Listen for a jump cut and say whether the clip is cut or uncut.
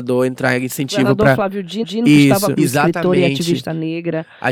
cut